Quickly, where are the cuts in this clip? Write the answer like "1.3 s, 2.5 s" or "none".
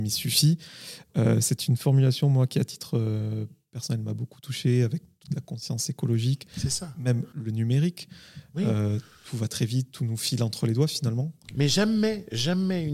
none